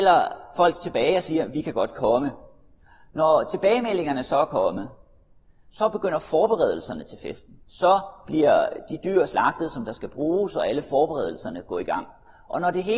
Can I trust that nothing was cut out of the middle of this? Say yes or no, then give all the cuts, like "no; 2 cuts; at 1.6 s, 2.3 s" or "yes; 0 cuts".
no; 1 cut; at 7.6 s